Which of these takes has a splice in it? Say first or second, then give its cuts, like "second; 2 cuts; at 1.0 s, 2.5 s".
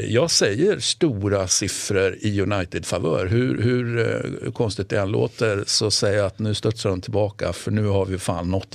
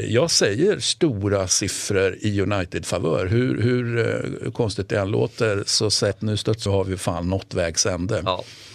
second; 2 cuts; at 6.1 s, 6.7 s